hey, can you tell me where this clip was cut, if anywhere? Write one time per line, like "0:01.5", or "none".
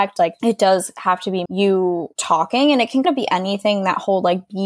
0:01.5
0:03.0